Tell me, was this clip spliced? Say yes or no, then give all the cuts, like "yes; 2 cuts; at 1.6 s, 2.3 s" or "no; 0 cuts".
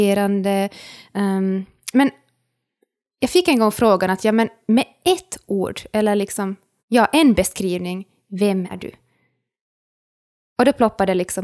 yes; 3 cuts; at 1.9 s, 6.8 s, 8.7 s